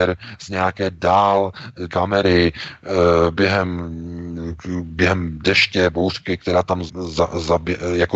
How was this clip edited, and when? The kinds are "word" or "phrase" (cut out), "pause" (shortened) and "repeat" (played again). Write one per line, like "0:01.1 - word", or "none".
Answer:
0:01.9 - phrase
0:06.9 - word